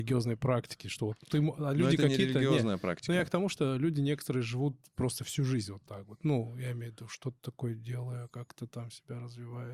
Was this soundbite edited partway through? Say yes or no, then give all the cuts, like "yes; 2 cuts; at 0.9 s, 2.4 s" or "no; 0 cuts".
no; 0 cuts